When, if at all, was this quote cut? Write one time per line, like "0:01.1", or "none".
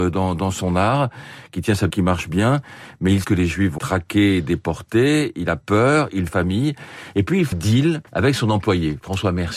0:01.9
0:03.2
0:03.8
0:06.3
0:07.5
0:08.1